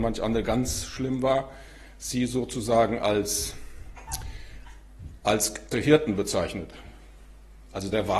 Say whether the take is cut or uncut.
cut